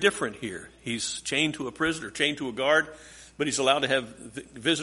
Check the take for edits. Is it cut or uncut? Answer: uncut